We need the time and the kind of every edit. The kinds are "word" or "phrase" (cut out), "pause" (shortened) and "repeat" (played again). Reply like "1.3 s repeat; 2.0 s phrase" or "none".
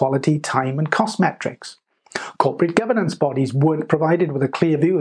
none